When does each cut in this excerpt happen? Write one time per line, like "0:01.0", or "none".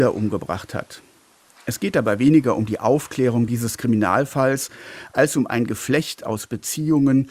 none

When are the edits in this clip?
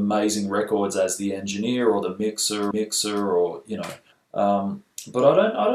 0:02.7
0:04.1

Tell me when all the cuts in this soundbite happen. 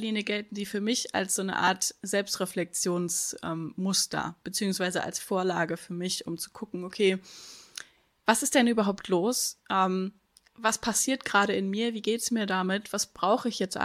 none

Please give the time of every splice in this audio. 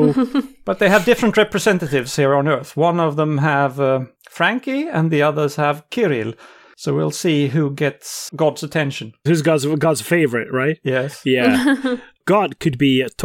0:08.3

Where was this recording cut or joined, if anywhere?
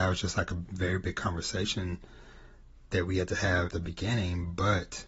0:02.8
0:03.7

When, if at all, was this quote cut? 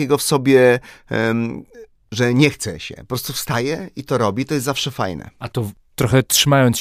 none

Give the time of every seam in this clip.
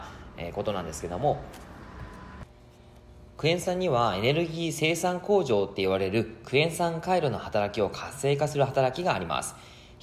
0:03.3

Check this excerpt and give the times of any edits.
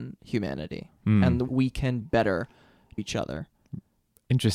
0:01.5
0:02.0
0:03.0

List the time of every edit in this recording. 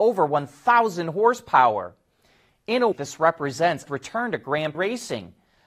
0:02.9
0:03.9
0:04.7

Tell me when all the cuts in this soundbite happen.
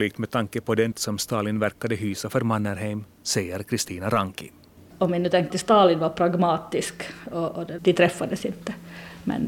0:00.9
0:03.1
0:04.8
0:05.5
0:07.8

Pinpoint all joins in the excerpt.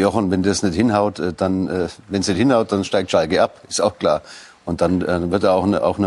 none

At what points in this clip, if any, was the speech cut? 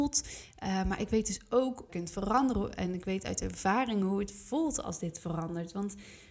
0:01.9

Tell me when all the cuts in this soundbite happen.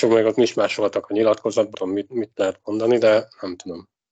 0:01.7

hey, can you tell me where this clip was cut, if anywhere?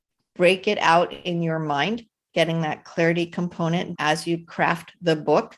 0:04.0

